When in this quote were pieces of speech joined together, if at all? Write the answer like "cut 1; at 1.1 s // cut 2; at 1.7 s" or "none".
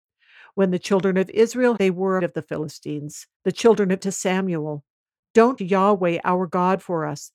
cut 1; at 1.8 s // cut 2; at 2.2 s // cut 3; at 3.3 s // cut 4; at 4.0 s // cut 5; at 5.6 s